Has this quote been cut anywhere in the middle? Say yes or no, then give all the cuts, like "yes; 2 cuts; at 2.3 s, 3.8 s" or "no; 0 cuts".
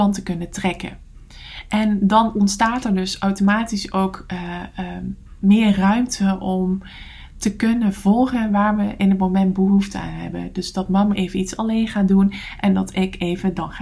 no; 0 cuts